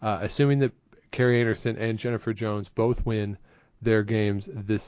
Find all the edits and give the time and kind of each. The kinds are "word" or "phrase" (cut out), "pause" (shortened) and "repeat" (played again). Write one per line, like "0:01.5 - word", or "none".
none